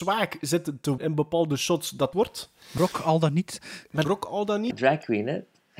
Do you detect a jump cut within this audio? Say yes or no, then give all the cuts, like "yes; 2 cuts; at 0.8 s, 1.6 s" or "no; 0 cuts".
yes; 5 cuts; at 1.0 s, 2.1 s, 2.8 s, 4.0 s, 4.7 s